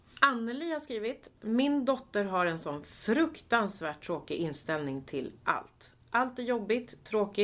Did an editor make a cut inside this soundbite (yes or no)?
no